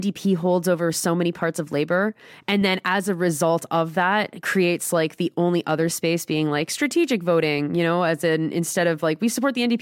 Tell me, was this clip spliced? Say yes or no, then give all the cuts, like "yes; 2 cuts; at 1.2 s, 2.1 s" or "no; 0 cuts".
no; 0 cuts